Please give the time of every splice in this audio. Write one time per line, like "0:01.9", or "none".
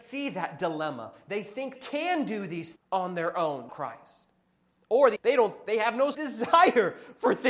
0:01.8
0:02.8
0:03.7
0:05.2
0:06.1